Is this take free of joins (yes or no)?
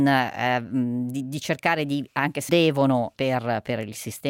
no